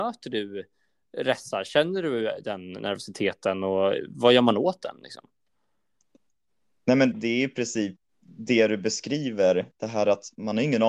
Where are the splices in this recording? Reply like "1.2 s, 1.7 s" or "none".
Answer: 7.1 s, 8.1 s